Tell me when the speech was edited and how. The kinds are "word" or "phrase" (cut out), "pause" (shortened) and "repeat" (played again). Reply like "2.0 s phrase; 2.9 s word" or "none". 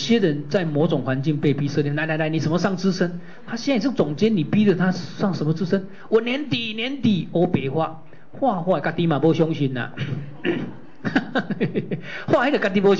none